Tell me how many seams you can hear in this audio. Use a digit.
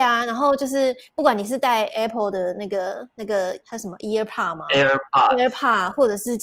1